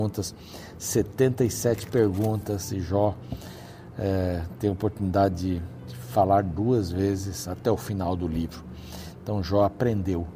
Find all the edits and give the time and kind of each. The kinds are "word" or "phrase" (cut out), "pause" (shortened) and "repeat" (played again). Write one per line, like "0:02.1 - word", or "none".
none